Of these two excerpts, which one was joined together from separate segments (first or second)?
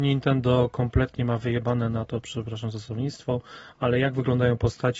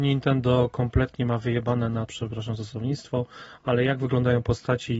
second